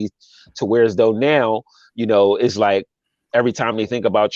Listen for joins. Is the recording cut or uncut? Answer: uncut